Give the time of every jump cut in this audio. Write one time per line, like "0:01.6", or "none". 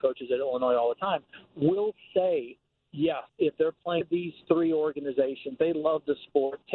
0:03.3
0:04.0
0:05.6